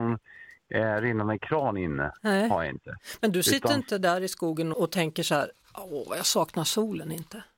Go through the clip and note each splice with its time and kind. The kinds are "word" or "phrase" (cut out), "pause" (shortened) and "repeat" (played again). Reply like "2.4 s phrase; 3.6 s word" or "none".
4.7 s word